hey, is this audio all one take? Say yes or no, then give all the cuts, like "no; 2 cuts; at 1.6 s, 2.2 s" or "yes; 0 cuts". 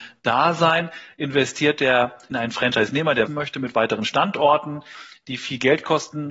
no; 2 cuts; at 2.3 s, 3.3 s